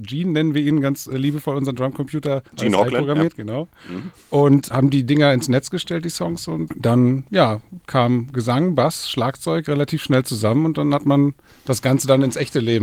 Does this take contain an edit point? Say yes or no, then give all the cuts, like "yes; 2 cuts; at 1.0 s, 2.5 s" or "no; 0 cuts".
yes; 2 cuts; at 2.5 s, 6.7 s